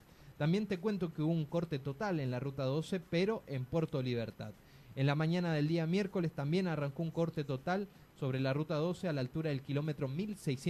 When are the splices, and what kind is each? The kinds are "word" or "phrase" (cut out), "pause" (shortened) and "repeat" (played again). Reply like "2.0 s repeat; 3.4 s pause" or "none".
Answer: none

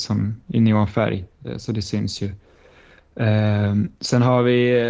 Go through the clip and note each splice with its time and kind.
4.0 s pause

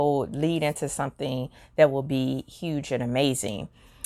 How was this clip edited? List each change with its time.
none

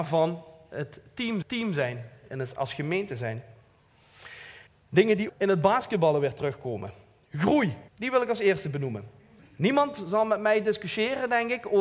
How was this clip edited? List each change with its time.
1.4 s repeat; 4.7 s pause; 5.3 s word; 7.9 s pause; 9.4 s pause

